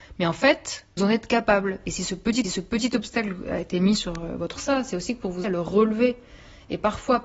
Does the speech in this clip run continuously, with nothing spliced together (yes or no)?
no